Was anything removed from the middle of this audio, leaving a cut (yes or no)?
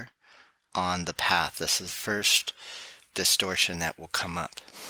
yes